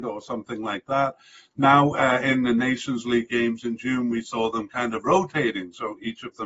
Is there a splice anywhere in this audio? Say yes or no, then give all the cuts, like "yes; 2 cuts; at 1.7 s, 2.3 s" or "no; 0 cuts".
no; 0 cuts